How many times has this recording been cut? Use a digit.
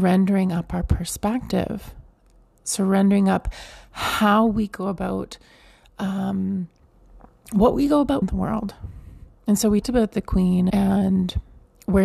3